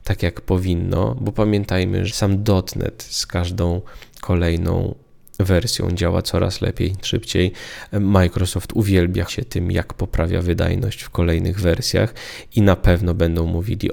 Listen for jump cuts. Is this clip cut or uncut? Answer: cut